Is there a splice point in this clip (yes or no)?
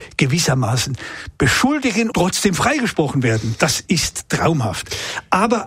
yes